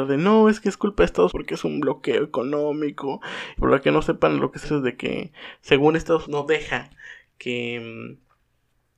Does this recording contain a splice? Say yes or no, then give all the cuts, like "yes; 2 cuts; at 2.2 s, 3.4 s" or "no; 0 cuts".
yes; 4 cuts; at 1.3 s, 3.6 s, 4.6 s, 6.3 s